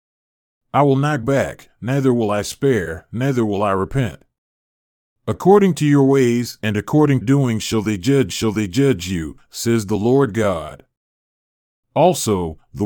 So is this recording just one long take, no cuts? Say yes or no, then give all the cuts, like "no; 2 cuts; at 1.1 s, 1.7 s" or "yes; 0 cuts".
no; 3 cuts; at 1.2 s, 7.2 s, 8.3 s